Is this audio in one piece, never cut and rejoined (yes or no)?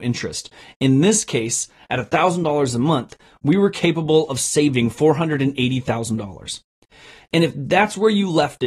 yes